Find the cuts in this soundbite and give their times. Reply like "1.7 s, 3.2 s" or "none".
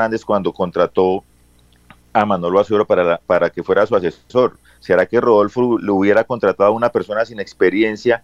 none